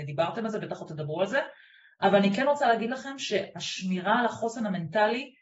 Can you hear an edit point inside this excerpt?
no; 0 cuts

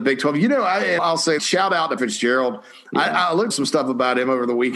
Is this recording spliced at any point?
yes; 4 cuts; at 1.0 s, 1.4 s, 2.0 s, 3.5 s

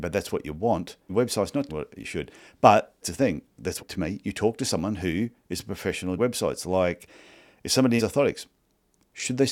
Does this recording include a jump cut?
yes; 6 cuts; at 1.1 s, 1.7 s, 3.0 s, 3.8 s, 6.2 s, 8.0 s

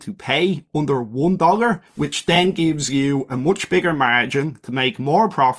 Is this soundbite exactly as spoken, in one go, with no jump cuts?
no; 1 cut; at 1.9 s

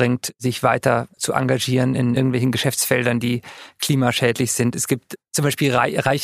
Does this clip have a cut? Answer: yes; 2 cuts; at 1.1 s, 5.2 s

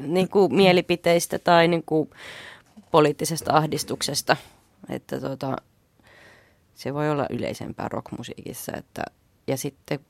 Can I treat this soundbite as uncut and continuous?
yes; 0 cuts

